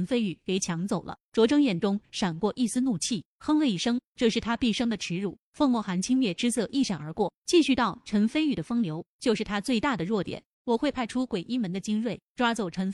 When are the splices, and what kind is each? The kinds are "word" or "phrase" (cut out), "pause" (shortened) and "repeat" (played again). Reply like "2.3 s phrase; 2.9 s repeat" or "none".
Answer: 10.5 s pause